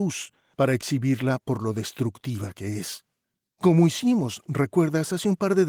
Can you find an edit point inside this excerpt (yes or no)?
no